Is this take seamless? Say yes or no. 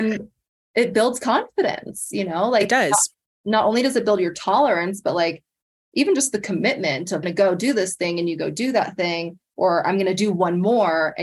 no